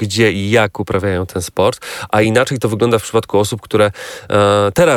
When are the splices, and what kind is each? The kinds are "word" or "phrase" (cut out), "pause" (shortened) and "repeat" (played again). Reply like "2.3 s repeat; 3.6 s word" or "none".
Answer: none